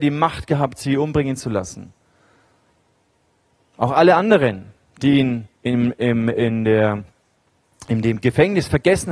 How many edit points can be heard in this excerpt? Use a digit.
1